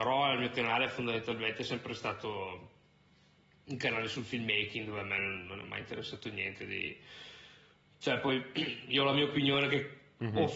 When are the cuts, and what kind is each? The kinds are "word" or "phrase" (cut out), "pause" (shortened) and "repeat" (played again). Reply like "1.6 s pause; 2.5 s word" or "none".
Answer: none